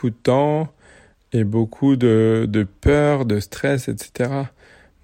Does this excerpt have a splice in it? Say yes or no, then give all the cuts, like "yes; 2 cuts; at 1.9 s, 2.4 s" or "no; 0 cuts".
no; 0 cuts